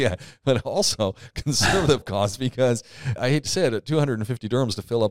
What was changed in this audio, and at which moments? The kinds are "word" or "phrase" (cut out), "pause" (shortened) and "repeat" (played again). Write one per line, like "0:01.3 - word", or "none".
0:02.0 - word
0:03.2 - word